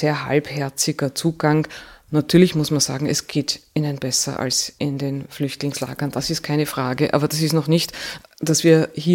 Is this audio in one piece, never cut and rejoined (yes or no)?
yes